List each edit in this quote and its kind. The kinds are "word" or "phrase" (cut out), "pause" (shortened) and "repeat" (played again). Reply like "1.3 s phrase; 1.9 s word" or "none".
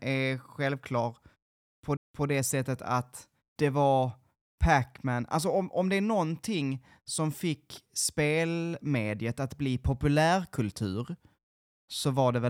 2.0 s repeat